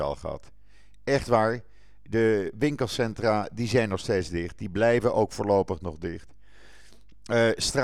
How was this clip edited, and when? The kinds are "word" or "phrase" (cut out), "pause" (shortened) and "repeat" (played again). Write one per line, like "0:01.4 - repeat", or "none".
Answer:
none